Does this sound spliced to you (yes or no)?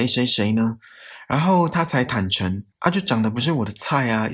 yes